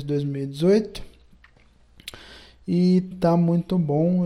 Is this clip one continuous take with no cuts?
no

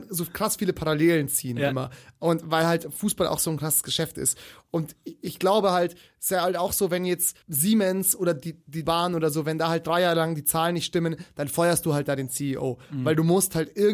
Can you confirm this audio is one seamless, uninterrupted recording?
no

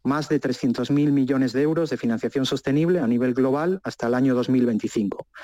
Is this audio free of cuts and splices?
yes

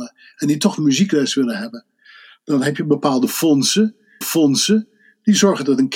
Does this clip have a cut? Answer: yes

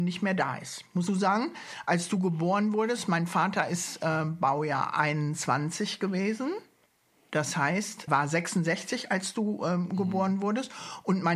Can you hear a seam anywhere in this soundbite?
yes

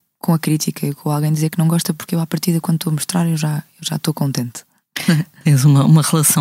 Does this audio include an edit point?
no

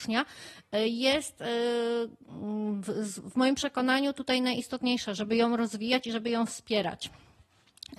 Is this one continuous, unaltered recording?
yes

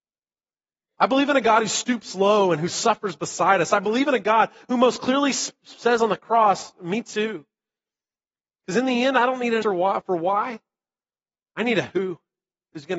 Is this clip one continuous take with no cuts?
no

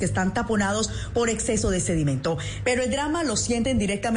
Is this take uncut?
yes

